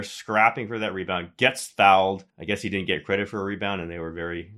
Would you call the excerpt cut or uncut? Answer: cut